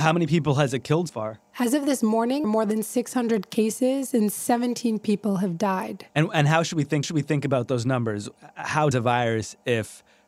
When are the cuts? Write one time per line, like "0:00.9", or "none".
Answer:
0:01.1
0:02.4
0:06.1
0:07.0
0:08.9